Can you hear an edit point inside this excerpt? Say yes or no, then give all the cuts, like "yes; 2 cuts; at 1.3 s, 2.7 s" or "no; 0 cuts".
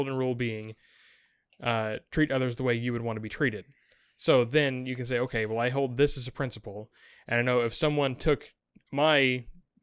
no; 0 cuts